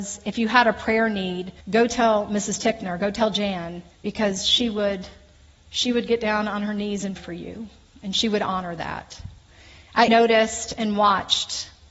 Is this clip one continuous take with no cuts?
no; 4 cuts; at 1.6 s, 3.9 s, 7.2 s, 10.1 s

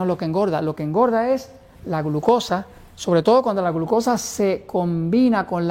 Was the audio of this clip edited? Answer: no; 0 cuts

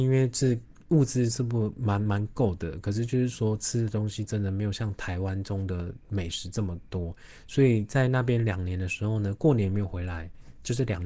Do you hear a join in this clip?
no; 0 cuts

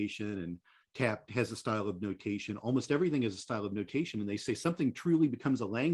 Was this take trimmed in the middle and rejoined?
no; 0 cuts

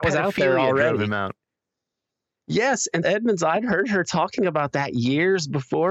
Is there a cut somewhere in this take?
yes; 1 cut; at 3.0 s

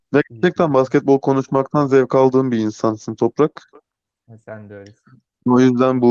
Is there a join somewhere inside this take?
no; 0 cuts

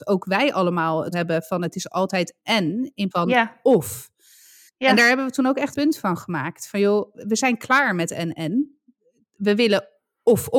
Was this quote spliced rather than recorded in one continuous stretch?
yes; 4 cuts; at 1.1 s, 2.4 s, 3.1 s, 5.7 s

